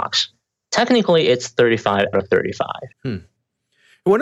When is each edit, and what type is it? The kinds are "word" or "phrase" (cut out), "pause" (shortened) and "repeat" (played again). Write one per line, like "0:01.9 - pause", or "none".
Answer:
0:02.1 - word
0:02.9 - pause